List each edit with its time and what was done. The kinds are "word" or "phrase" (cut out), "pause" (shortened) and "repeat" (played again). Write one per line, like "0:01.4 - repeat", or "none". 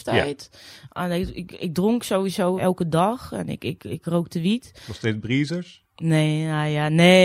0:02.6 - word